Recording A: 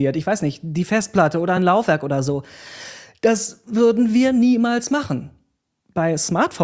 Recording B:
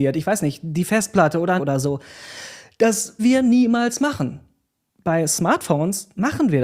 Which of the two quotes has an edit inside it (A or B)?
B